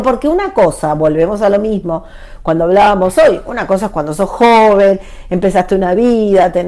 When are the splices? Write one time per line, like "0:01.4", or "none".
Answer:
none

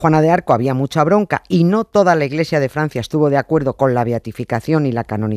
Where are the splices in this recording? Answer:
none

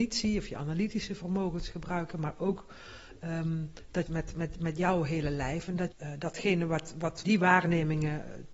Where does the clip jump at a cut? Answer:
0:04.1
0:05.9
0:07.2

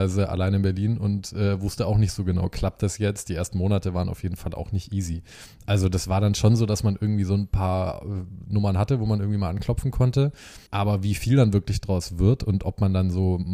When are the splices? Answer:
0:10.7

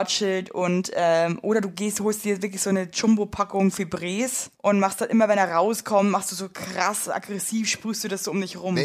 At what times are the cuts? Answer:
0:04.5

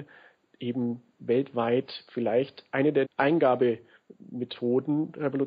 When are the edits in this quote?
0:03.0

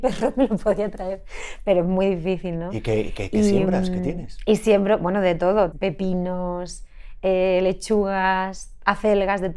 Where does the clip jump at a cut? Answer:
0:05.7

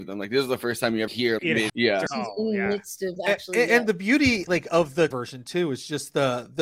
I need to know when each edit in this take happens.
0:01.1
0:01.4
0:01.7
0:02.1
0:03.7
0:04.5
0:05.1

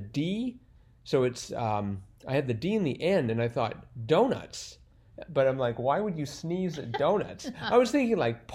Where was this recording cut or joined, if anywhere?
none

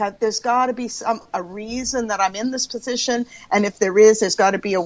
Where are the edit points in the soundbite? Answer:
none

